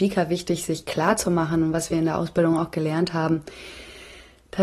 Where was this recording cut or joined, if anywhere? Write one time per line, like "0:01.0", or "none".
none